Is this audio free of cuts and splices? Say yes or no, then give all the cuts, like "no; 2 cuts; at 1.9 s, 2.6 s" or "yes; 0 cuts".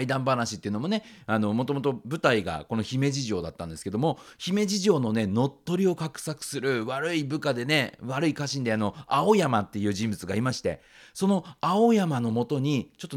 yes; 0 cuts